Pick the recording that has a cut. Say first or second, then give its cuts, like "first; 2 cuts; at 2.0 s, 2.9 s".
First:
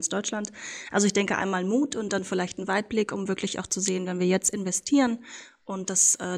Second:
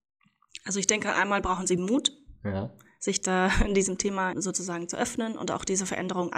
second; 1 cut; at 4.3 s